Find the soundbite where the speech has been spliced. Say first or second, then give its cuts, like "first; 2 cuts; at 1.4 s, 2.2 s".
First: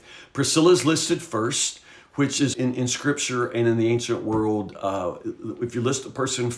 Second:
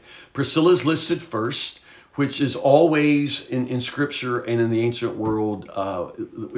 first; 1 cut; at 2.5 s